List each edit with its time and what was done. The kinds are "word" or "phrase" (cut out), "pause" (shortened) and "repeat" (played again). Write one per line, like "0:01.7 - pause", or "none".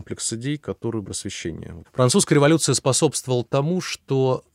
0:01.0 - phrase